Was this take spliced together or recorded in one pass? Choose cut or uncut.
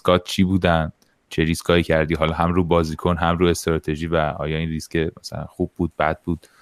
uncut